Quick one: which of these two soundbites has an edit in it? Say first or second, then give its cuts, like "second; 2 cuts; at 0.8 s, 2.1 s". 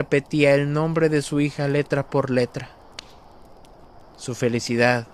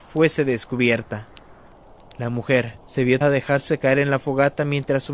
second; 3 cuts; at 1.7 s, 2.8 s, 3.2 s